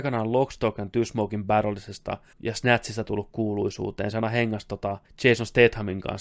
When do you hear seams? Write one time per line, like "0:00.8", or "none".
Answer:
0:02.3
0:05.0